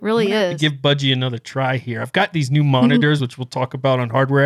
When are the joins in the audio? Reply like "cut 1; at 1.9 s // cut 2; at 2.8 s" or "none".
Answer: none